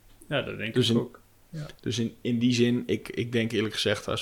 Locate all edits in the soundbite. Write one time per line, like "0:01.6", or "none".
none